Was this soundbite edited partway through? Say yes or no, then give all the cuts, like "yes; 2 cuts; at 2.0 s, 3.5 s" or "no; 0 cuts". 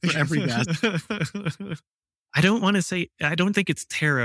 no; 0 cuts